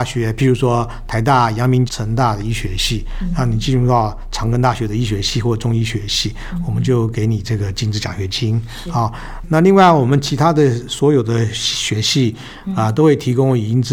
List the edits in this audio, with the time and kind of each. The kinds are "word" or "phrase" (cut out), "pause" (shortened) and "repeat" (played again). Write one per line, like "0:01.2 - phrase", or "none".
0:01.9 - phrase